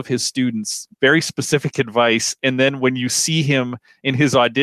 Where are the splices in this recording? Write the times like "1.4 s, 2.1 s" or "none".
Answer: 0.9 s